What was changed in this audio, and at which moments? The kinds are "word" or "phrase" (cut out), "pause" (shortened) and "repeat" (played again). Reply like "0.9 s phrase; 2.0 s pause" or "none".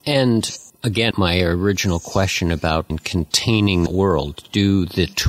1.1 s word; 2.9 s word; 3.9 s word